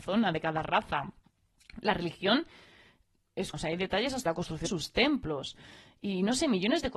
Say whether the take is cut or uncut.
cut